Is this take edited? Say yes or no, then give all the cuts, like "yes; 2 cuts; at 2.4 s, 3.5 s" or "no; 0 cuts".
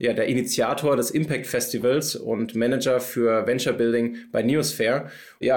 no; 0 cuts